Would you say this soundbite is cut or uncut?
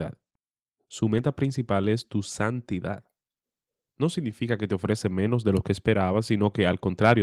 uncut